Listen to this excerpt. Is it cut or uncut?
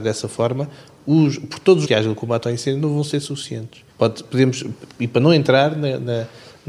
cut